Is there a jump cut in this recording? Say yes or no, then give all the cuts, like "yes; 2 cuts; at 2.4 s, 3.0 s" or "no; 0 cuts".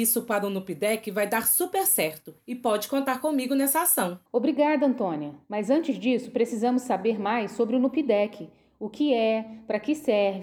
yes; 2 cuts; at 4.3 s, 5.4 s